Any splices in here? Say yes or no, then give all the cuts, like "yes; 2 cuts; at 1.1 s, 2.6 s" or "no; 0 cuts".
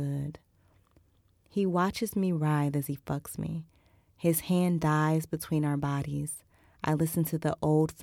no; 0 cuts